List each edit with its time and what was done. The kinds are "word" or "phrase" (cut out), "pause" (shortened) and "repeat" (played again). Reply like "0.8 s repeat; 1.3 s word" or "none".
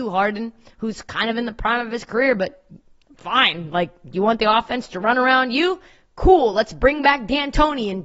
none